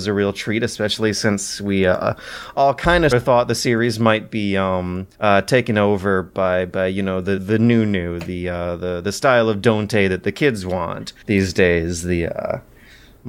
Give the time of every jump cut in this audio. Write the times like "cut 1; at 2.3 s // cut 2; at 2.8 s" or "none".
cut 1; at 3.1 s // cut 2; at 5.1 s // cut 3; at 7.4 s // cut 4; at 11.2 s